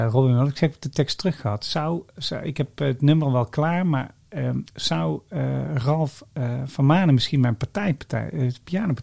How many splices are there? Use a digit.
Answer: 2